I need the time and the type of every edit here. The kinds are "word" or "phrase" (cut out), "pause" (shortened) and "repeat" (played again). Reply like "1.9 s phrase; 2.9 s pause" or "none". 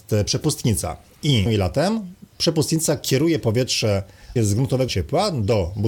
1.5 s word; 4.4 s word; 4.9 s word